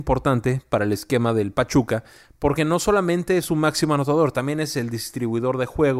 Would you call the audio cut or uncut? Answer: uncut